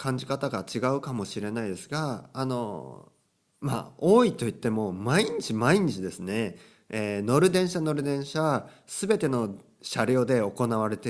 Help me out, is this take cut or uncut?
uncut